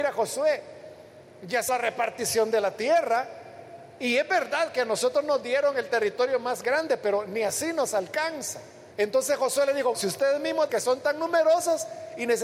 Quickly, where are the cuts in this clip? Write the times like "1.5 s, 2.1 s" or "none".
1.7 s, 8.9 s, 9.9 s, 10.7 s

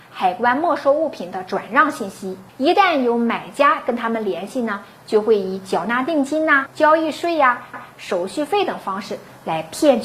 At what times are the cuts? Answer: 2.5 s, 6.7 s, 7.7 s

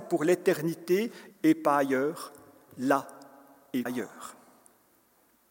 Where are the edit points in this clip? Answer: 1.3 s, 3.9 s

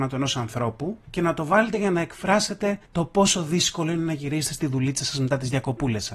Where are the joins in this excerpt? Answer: 1.0 s, 2.8 s

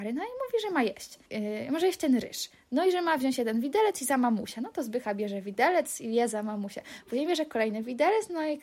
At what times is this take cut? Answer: 1.2 s

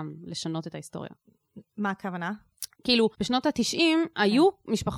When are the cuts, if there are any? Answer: 3.1 s

